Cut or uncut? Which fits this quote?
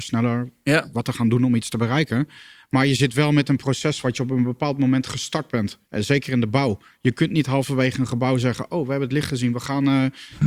cut